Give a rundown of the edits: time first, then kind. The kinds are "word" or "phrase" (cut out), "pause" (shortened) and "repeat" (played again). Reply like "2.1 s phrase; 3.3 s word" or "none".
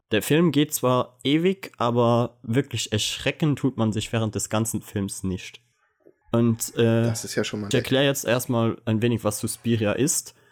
7.7 s phrase